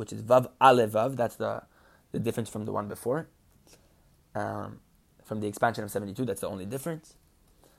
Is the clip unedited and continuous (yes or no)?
yes